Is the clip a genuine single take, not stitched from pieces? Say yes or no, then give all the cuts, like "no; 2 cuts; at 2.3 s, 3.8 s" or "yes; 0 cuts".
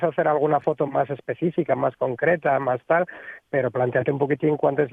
yes; 0 cuts